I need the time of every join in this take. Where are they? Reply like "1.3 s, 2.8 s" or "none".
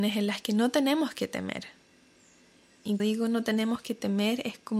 3.0 s